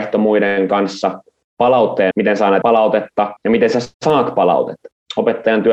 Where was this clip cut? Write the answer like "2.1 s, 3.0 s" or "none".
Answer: 2.1 s, 2.6 s, 3.4 s, 3.9 s